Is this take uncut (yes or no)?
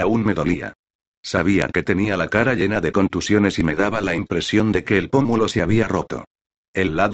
yes